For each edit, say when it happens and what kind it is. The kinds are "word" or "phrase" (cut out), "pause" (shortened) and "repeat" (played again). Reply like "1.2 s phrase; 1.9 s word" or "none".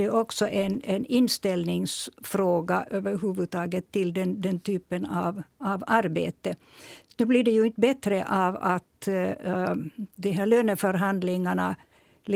none